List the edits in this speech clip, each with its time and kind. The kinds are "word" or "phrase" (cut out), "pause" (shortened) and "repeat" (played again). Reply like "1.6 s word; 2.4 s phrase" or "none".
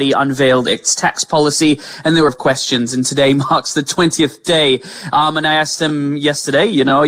2.3 s phrase